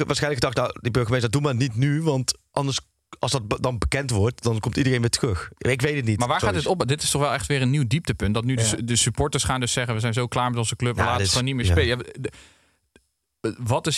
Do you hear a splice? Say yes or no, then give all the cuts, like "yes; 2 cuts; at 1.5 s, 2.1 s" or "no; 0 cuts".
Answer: no; 0 cuts